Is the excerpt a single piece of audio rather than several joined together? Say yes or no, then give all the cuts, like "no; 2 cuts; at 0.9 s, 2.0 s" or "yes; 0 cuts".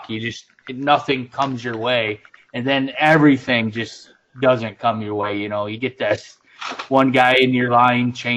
yes; 0 cuts